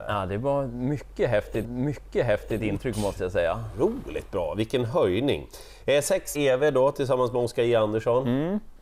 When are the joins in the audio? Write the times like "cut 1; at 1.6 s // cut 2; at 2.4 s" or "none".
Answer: cut 1; at 1.6 s // cut 2; at 6.3 s